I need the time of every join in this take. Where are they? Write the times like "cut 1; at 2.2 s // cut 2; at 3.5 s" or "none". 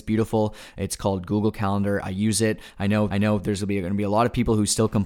cut 1; at 3.1 s